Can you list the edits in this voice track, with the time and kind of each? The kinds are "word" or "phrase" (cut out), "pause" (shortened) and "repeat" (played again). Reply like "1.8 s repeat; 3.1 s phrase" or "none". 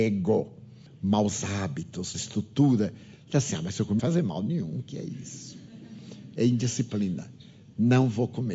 2.1 s word; 4.0 s phrase